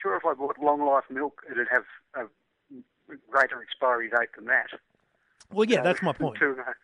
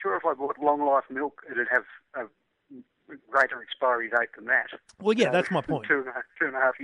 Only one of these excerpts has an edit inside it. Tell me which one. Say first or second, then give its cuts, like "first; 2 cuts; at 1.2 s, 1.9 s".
second; 1 cut; at 4.9 s